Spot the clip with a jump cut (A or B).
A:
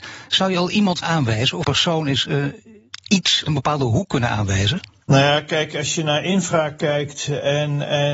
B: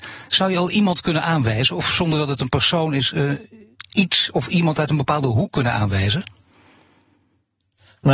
A